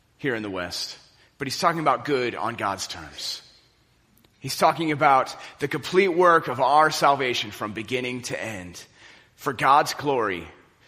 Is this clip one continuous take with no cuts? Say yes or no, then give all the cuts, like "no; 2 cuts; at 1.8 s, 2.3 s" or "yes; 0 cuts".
yes; 0 cuts